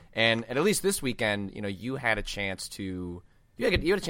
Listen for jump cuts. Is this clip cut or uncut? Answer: uncut